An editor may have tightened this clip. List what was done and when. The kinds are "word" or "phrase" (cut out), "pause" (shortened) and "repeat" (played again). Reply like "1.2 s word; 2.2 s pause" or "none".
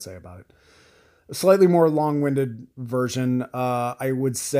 none